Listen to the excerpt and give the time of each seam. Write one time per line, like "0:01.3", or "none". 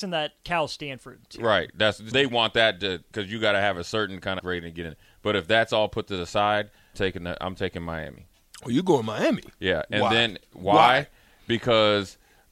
0:02.1
0:04.4
0:06.9